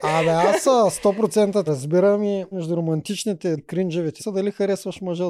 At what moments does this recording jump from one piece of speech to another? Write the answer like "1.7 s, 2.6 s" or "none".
1.7 s, 2.5 s, 3.6 s, 4.2 s